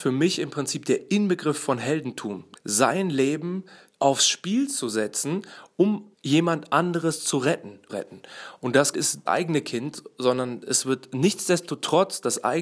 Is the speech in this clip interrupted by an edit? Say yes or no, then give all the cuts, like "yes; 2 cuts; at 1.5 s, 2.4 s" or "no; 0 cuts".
yes; 6 cuts; at 2.5 s, 3.9 s, 6.1 s, 7.9 s, 8.9 s, 9.3 s